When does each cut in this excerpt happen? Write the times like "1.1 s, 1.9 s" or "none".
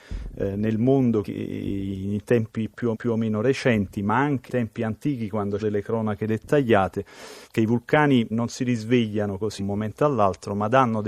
1.2 s, 2.9 s, 4.5 s, 5.6 s, 7.4 s, 8.3 s, 9.6 s